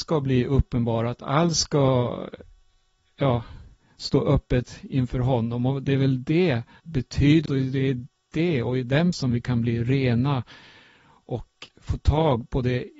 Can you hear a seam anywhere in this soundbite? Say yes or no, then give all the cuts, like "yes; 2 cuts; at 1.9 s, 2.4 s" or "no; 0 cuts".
yes; 3 cuts; at 6.8 s, 7.5 s, 9.1 s